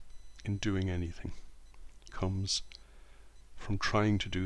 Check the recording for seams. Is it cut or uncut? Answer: cut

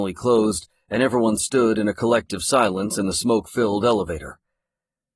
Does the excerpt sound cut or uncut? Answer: uncut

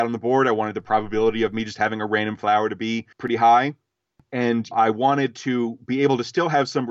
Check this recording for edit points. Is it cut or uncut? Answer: cut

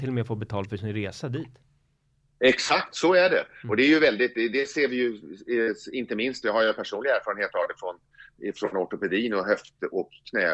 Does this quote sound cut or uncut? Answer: uncut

